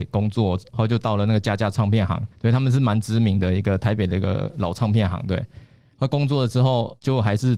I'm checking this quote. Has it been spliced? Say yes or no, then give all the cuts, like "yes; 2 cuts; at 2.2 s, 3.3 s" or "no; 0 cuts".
yes; 1 cut; at 2.3 s